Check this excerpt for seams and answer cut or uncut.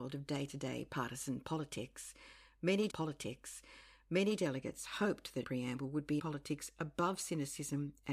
cut